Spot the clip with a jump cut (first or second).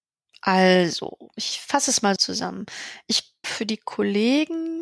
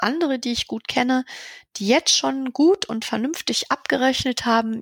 first